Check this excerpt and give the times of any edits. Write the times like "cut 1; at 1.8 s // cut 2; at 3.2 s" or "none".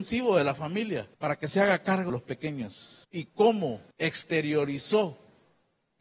cut 1; at 1.1 s // cut 2; at 2.1 s // cut 3; at 3.0 s // cut 4; at 3.9 s